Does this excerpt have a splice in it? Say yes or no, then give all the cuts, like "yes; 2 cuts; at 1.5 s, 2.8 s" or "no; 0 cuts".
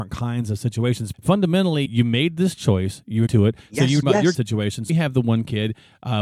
yes; 6 cuts; at 1.1 s, 1.9 s, 3.3 s, 4.0 s, 4.3 s, 4.9 s